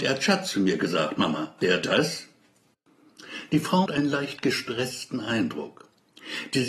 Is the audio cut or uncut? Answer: cut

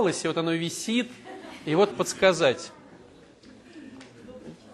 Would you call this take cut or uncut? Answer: cut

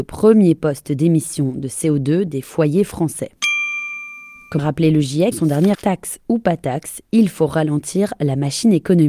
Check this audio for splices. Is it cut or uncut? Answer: cut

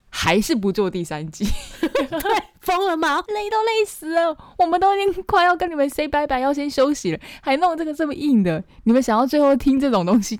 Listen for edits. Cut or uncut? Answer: uncut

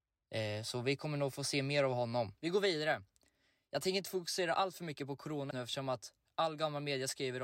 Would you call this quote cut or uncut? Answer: cut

